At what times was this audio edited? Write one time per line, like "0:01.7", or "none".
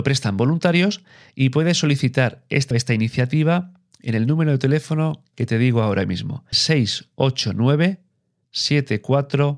0:02.7
0:06.5

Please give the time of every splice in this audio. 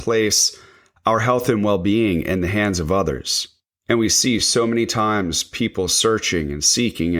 none

